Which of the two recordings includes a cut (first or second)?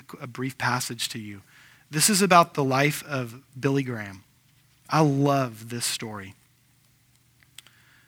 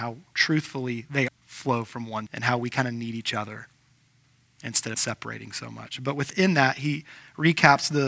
second